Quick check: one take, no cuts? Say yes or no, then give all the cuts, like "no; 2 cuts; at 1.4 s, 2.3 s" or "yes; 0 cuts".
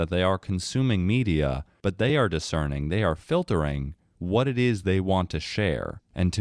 yes; 0 cuts